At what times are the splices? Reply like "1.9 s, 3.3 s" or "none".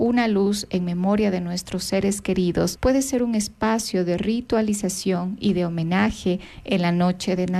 none